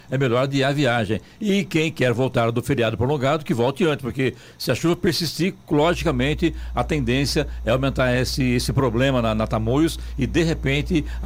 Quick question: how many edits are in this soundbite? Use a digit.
0